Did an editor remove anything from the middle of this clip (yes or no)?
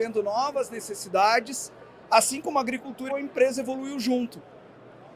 yes